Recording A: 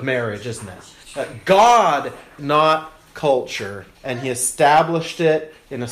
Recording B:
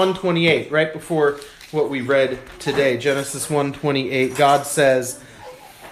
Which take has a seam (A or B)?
A